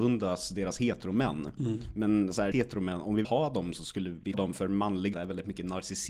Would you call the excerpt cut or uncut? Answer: cut